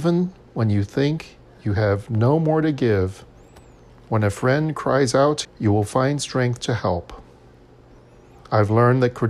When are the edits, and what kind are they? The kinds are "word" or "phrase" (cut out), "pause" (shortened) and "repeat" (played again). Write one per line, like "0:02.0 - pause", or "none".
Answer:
0:05.4 - word